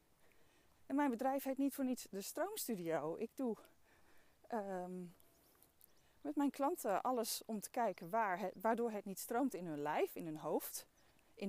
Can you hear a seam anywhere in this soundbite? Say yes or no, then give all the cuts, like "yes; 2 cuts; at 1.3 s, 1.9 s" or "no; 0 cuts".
no; 0 cuts